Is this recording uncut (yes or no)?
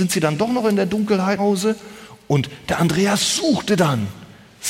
no